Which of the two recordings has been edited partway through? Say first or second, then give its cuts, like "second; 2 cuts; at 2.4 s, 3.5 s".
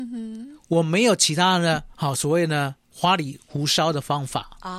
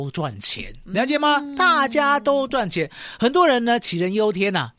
first; 2 cuts; at 1.9 s, 2.8 s